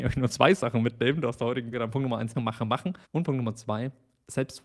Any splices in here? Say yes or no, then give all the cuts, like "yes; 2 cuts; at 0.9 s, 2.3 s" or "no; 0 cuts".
yes; 3 cuts; at 1.7 s, 2.3 s, 3.0 s